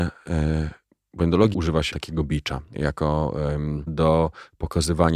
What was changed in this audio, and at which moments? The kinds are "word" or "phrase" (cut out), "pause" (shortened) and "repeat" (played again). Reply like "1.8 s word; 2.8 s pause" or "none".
1.5 s word; 1.9 s word; 2.7 s word; 3.9 s word